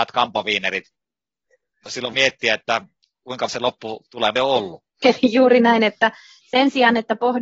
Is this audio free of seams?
no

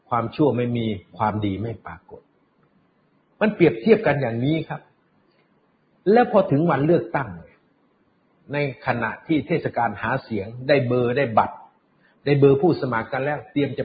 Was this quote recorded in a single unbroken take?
yes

